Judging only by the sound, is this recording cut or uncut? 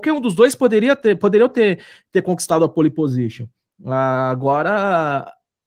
uncut